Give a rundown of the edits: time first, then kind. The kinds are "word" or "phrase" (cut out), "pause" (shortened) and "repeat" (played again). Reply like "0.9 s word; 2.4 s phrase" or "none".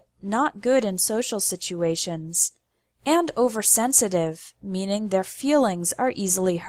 none

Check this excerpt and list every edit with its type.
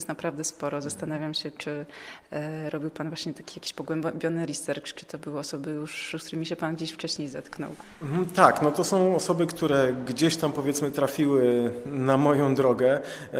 none

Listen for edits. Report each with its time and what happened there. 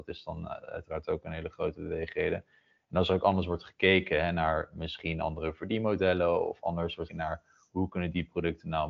7.1 s word

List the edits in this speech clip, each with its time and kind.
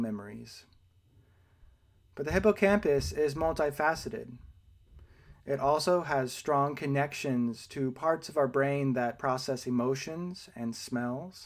none

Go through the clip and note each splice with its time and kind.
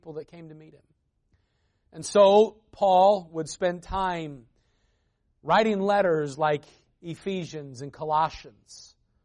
none

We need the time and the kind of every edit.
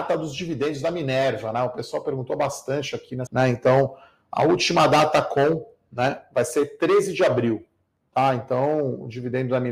3.3 s phrase

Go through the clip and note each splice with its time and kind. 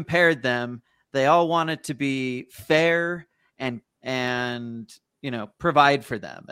3.8 s word

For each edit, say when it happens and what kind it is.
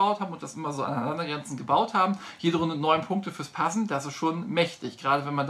none

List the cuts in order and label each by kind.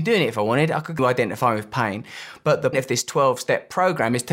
1.0 s word; 2.7 s word

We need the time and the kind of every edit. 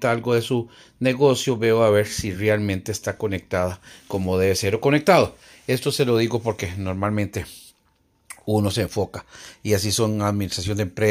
none

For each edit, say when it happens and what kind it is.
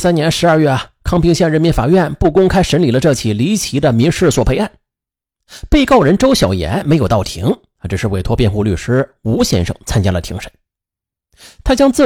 none

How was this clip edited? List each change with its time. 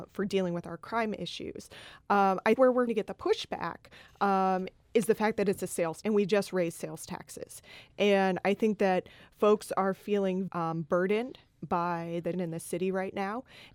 2.6 s word; 2.9 s word; 6.0 s word; 10.5 s word; 12.3 s word

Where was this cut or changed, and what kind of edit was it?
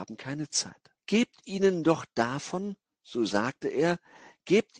1.0 s pause

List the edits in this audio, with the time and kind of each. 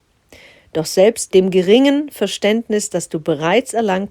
1.3 s word

